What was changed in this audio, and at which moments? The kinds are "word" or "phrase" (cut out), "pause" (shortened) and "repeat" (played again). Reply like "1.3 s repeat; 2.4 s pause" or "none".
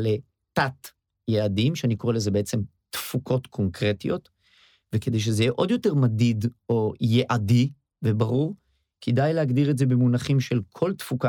none